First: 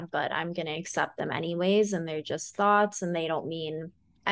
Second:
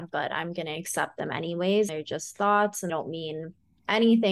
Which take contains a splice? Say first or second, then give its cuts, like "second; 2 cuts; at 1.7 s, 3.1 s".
second; 2 cuts; at 1.9 s, 2.9 s